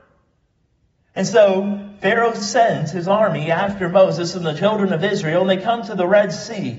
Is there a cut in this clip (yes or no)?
no